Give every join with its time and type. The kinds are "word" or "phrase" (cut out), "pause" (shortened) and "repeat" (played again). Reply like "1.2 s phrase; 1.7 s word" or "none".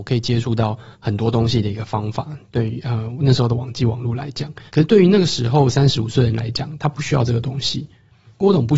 0.9 s pause; 4.7 s pause